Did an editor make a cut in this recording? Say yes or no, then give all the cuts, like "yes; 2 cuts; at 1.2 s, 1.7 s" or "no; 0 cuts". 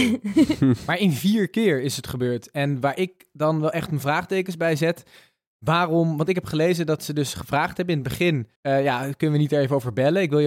yes; 1 cut; at 8.6 s